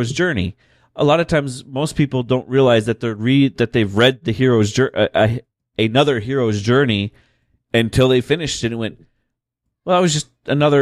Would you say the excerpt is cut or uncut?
uncut